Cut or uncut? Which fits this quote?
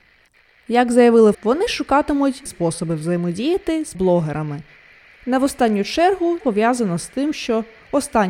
cut